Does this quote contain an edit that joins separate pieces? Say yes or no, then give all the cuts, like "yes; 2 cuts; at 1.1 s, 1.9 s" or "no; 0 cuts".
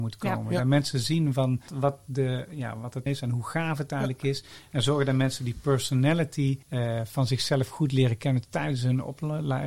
yes; 3 cuts; at 1.7 s, 3.1 s, 6.6 s